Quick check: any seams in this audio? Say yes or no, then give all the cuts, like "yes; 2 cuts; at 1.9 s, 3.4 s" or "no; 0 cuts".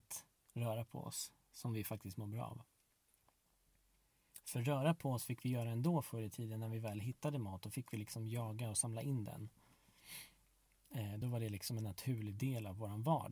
no; 0 cuts